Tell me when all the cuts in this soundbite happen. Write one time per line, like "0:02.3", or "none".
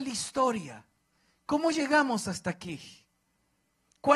none